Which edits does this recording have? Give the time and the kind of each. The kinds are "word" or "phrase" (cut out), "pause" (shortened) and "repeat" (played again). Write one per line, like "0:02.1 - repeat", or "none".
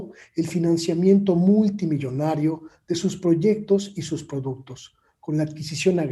none